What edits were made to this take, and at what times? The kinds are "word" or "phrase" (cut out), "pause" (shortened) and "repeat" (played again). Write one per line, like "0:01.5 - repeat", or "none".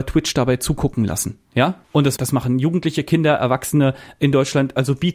0:02.2 - word

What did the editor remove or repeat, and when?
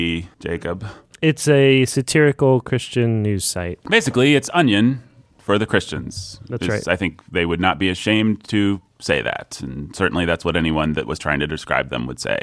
none

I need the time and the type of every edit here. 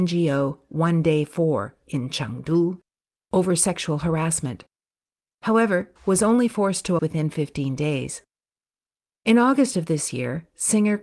0:06.0 - word
0:07.0 - word

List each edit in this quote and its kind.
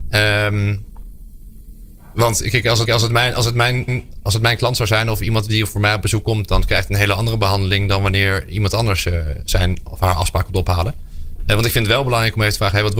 0:02.9 - repeat
0:03.9 - repeat

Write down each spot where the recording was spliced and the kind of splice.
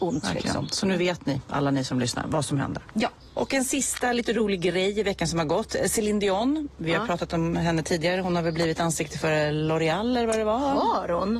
none

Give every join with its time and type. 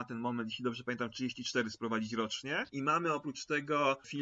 0:02.7 - pause

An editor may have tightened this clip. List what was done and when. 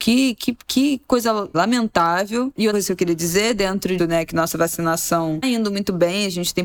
0:01.5 - word
0:02.7 - word
0:04.0 - word
0:05.4 - word

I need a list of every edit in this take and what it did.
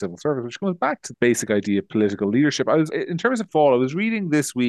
0:01.1 - word
0:02.9 - word
0:03.5 - word

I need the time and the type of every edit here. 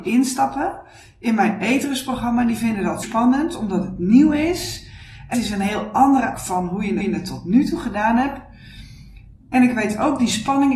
0:03.0 - word
0:05.3 - word
0:06.3 - word
0:07.0 - repeat

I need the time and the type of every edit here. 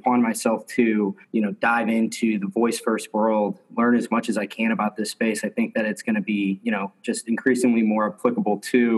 0:01.2 - pause

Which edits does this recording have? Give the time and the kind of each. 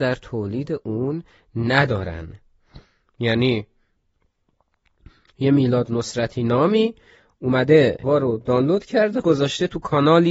0:08.0 - word
0:09.2 - word

